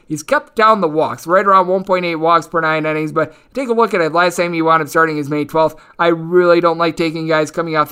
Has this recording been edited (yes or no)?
no